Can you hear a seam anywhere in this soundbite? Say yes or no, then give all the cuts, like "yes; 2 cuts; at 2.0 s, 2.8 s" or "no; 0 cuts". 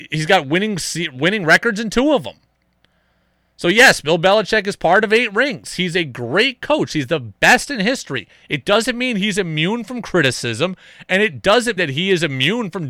yes; 1 cut; at 11.8 s